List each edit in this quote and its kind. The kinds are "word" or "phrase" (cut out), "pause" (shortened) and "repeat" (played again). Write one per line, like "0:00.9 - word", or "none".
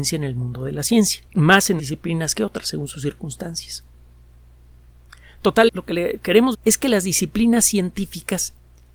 0:01.3 - pause
0:01.8 - word
0:05.7 - phrase
0:06.5 - word